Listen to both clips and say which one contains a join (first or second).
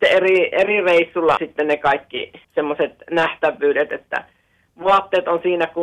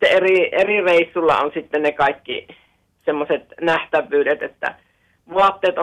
first